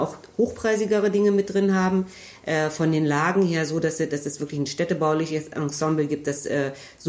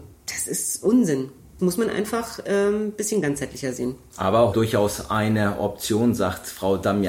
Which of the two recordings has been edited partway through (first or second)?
second